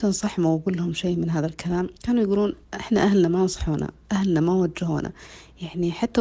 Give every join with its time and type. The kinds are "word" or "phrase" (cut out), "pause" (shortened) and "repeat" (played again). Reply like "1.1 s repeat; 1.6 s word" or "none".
2.0 s pause; 2.6 s pause